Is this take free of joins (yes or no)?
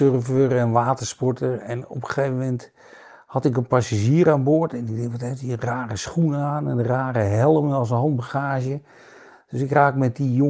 yes